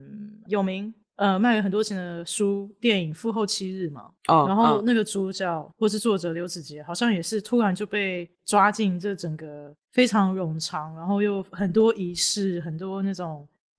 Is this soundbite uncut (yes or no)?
no